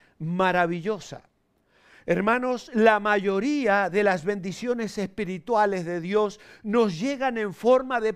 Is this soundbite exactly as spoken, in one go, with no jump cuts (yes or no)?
yes